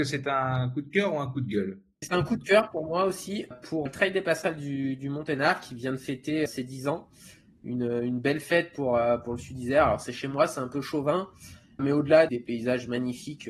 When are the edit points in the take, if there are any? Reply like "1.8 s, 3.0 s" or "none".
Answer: 2.0 s, 3.5 s, 3.9 s, 6.5 s, 11.8 s, 12.3 s

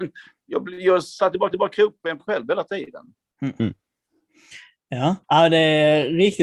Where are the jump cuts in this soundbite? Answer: 1.5 s, 2.2 s, 5.2 s

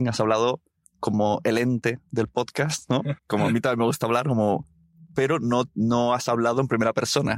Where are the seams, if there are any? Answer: 3.2 s

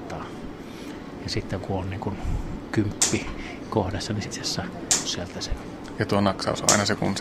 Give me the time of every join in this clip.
1.6 s, 4.2 s, 5.0 s

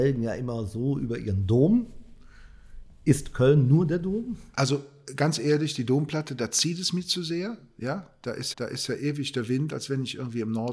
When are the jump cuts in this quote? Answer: 8.5 s

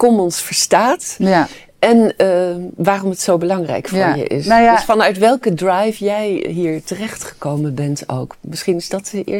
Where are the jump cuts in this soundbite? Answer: none

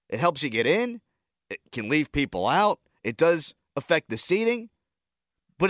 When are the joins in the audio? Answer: none

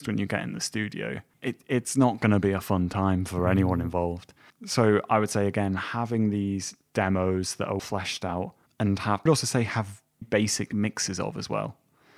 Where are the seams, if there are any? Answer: 1.3 s, 4.5 s, 7.8 s, 8.7 s, 9.3 s, 10.2 s

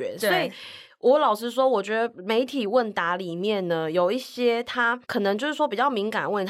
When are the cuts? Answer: 5.0 s

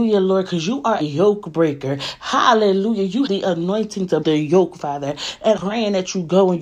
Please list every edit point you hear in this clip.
1.0 s, 3.3 s, 4.2 s, 5.6 s

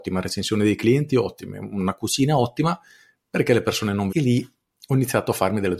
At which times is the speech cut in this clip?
4.1 s

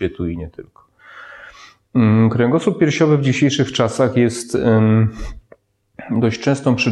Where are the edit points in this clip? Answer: none

